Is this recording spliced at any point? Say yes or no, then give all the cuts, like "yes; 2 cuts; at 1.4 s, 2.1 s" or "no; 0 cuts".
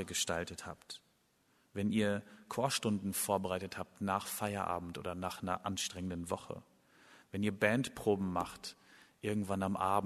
no; 0 cuts